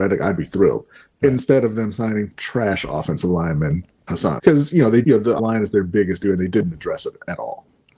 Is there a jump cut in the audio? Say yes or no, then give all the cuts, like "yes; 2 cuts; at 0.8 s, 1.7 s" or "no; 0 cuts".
yes; 6 cuts; at 2.3 s, 4.1 s, 4.4 s, 5.0 s, 5.4 s, 6.2 s